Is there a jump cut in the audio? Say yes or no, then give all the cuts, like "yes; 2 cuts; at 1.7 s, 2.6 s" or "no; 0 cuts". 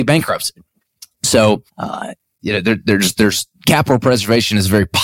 yes; 2 cuts; at 1.7 s, 3.6 s